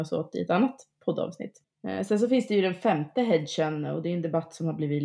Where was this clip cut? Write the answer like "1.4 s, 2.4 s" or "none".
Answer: 1.7 s